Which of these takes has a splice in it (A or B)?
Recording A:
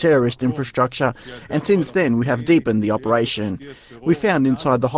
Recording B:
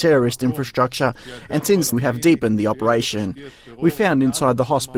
B